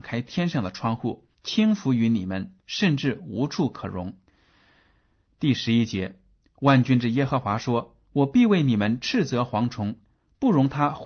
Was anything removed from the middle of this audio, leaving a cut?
yes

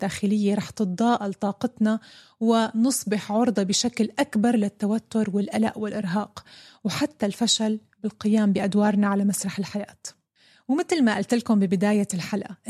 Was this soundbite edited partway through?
no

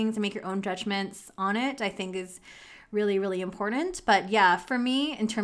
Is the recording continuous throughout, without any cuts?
yes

